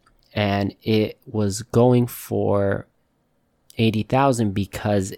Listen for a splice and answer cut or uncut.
uncut